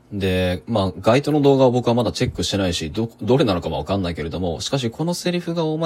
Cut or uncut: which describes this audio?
uncut